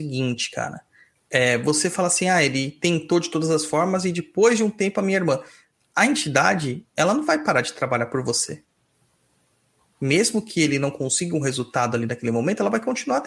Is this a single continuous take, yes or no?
yes